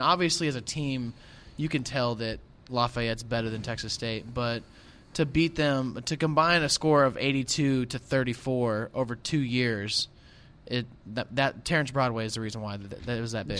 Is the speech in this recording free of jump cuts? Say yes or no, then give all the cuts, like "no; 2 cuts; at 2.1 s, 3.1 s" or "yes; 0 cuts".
yes; 0 cuts